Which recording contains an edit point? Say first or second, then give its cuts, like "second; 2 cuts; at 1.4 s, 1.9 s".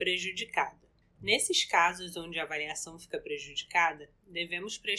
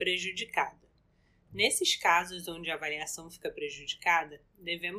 first; 1 cut; at 1.0 s